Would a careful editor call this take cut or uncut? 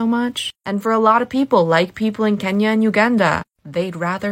uncut